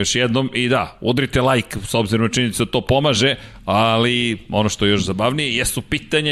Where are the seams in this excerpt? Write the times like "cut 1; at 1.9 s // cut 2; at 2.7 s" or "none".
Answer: none